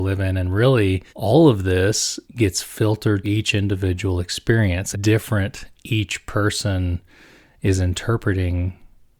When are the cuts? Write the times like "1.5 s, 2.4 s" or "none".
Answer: 1.1 s, 2.3 s, 3.2 s, 4.9 s